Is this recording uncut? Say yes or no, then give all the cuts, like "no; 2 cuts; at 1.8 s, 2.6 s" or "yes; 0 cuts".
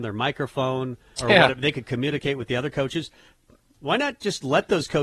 no; 1 cut; at 1.2 s